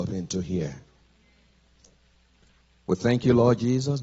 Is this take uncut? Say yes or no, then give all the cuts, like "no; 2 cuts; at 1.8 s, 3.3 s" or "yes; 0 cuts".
yes; 0 cuts